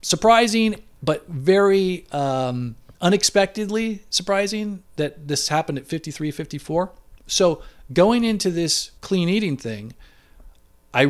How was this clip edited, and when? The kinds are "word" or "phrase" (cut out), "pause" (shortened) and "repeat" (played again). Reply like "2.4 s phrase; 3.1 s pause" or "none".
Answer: 2.9 s pause; 4.9 s pause; 9.0 s pause